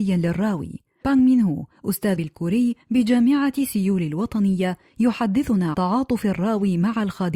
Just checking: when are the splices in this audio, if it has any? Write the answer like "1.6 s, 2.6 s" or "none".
1.0 s, 2.2 s, 5.7 s

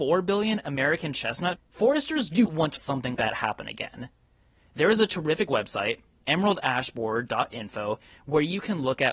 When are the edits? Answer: 1.6 s, 2.5 s, 2.8 s, 3.1 s

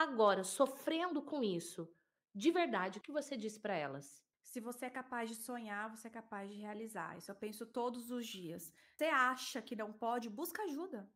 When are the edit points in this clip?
3.0 s, 4.3 s, 9.0 s

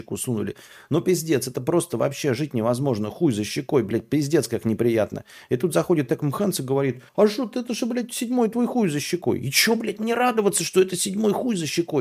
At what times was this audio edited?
7.1 s

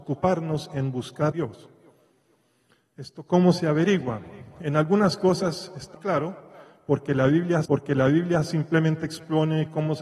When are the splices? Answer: 1.3 s, 5.9 s, 7.6 s

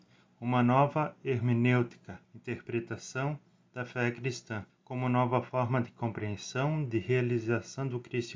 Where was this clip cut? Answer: 2.2 s, 4.7 s

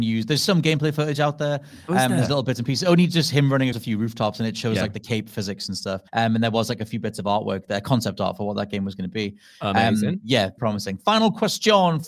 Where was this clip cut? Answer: 3.7 s, 6.1 s, 10.6 s

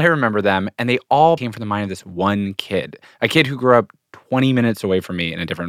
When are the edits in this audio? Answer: 1.4 s

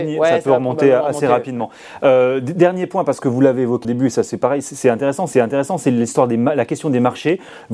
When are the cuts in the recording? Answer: 3.8 s, 5.3 s

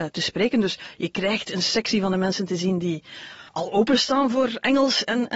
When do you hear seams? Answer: 3.5 s

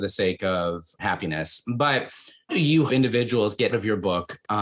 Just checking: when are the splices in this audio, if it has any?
1.0 s, 2.5 s, 2.9 s, 3.7 s

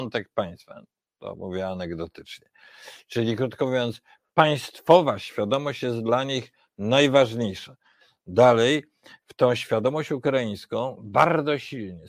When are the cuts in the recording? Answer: none

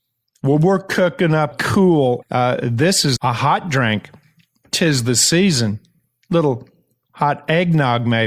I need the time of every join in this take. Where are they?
1.5 s, 2.2 s, 3.2 s

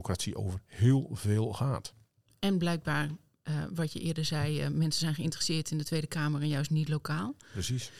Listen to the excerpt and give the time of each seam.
none

